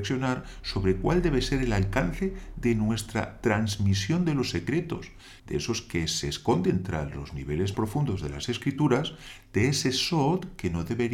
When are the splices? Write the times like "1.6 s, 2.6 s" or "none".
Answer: 5.4 s, 7.7 s